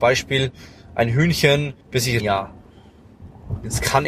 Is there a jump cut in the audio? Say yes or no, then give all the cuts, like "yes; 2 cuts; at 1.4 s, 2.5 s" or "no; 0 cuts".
yes; 2 cuts; at 1.8 s, 2.2 s